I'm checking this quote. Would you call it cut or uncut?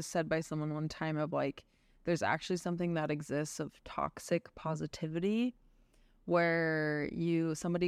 uncut